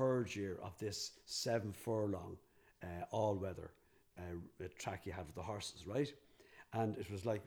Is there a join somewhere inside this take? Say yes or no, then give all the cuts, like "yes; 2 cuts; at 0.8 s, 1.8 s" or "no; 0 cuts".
no; 0 cuts